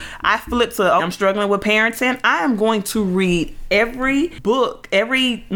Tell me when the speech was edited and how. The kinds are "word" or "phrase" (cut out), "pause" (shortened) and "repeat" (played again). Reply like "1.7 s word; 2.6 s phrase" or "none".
1.0 s word